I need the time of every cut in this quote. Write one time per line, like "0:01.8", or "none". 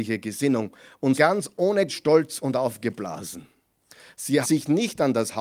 0:01.2
0:01.9
0:04.4

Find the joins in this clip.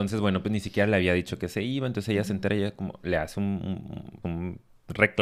0:04.2

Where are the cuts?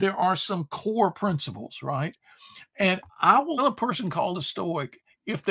0:03.1
0:03.6
0:04.3

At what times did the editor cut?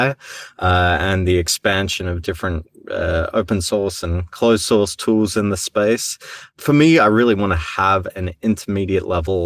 none

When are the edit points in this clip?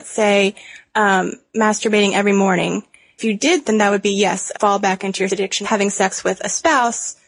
0:03.2
0:03.6
0:04.5
0:05.3
0:05.6

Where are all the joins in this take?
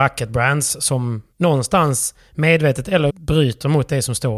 0:01.3
0:03.1

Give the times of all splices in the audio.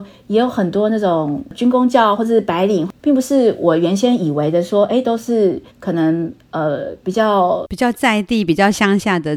0:05.7

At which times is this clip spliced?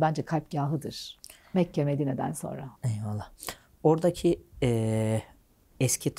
0:02.8

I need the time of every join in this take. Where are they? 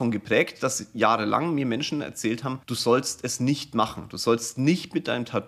0:02.6

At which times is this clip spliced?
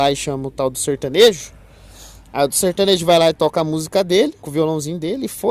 0:04.4

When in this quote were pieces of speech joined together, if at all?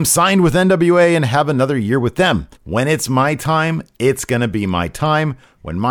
0:02.6

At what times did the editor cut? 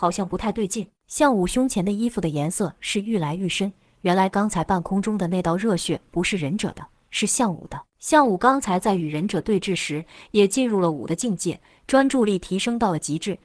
0:01.0
0:07.9

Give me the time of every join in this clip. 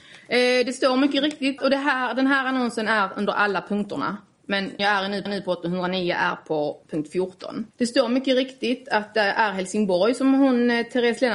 0:01.6
0:04.8
0:05.3
0:06.8
0:07.7

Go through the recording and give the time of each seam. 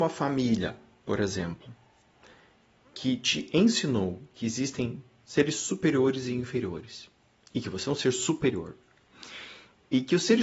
none

